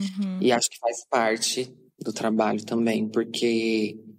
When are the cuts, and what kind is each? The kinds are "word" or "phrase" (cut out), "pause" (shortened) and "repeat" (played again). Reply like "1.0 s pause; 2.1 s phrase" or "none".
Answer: none